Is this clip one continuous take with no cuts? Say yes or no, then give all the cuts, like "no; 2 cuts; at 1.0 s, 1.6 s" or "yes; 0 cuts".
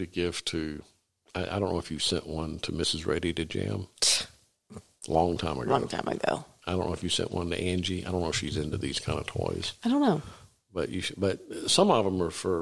yes; 0 cuts